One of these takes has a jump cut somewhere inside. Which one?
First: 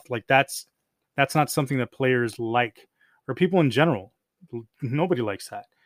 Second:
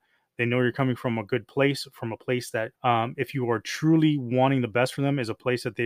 second; 1 cut; at 2.8 s

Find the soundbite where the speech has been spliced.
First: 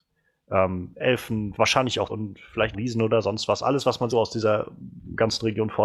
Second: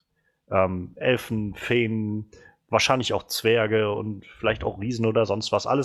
first; 4 cuts; at 1.5 s, 2.1 s, 2.7 s, 4.1 s

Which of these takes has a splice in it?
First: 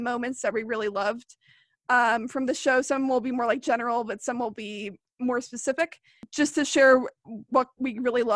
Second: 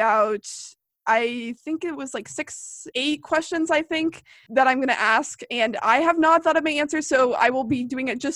second; 1 cut; at 2.9 s

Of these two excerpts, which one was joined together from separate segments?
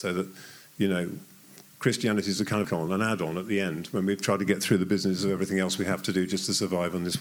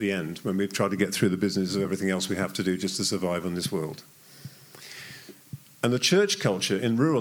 first; 1 cut; at 2.6 s

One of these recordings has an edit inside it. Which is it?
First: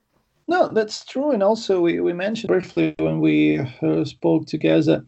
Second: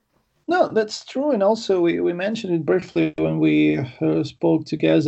first; 1 cut; at 2.5 s

